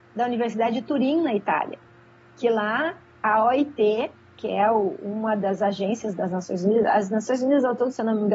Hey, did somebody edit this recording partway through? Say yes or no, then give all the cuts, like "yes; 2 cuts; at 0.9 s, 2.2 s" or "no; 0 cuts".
no; 0 cuts